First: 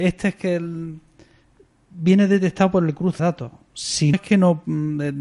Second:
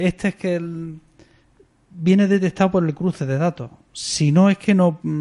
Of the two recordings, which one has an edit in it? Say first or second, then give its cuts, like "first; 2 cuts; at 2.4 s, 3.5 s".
first; 2 cuts; at 3.2 s, 4.1 s